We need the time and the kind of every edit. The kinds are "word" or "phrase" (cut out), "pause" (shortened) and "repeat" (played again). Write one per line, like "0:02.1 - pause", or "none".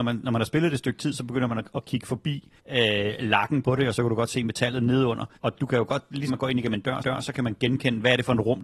0:02.6 - pause
0:05.4 - pause
0:06.3 - word
0:07.0 - repeat